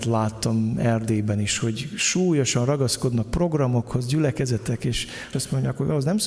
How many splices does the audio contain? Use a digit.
1